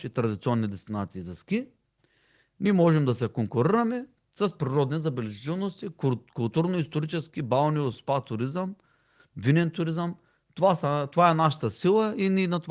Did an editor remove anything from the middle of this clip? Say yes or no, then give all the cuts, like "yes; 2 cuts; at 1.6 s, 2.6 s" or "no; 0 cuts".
no; 0 cuts